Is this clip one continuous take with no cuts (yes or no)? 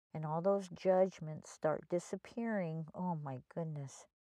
yes